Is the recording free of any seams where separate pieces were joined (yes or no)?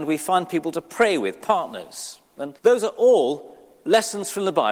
no